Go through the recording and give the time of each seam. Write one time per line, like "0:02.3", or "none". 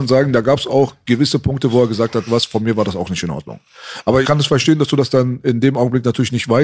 0:02.3
0:04.2